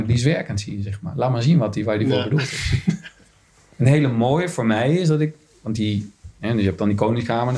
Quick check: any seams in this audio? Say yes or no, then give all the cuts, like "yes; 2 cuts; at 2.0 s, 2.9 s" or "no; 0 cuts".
no; 0 cuts